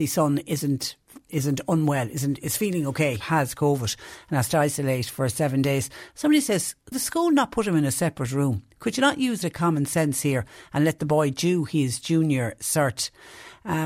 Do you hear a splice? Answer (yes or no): yes